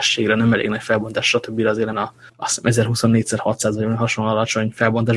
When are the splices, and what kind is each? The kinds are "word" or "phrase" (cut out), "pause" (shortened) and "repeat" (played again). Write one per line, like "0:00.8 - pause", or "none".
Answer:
0:01.9 - word
0:02.3 - pause